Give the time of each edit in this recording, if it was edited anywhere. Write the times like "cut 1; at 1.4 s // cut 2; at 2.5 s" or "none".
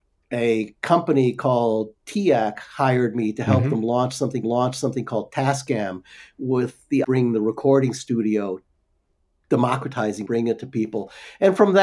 cut 1; at 4.4 s // cut 2; at 7.0 s // cut 3; at 10.3 s